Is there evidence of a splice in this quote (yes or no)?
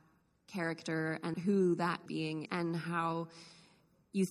yes